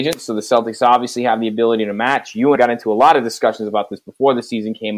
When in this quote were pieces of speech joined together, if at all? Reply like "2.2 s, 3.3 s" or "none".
2.6 s